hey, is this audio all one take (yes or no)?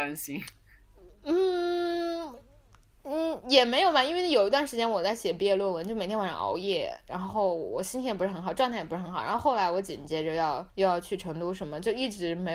no